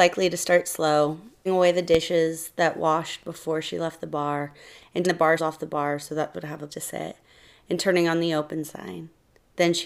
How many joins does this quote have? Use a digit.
5